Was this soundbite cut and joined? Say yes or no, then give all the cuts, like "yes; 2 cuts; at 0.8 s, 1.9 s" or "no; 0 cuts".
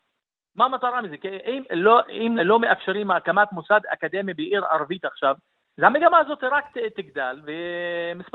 yes; 2 cuts; at 1.7 s, 2.4 s